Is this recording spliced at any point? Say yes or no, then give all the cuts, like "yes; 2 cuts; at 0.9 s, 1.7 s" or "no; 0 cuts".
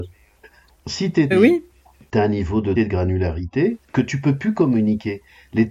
yes; 3 cuts; at 1.3 s, 2.8 s, 3.8 s